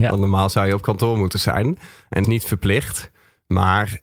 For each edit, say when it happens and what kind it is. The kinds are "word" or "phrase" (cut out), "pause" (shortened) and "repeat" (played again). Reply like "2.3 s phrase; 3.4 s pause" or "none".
2.2 s phrase